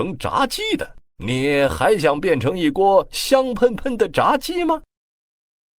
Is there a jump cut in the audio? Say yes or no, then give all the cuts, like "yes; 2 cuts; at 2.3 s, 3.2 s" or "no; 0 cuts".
yes; 1 cut; at 1.1 s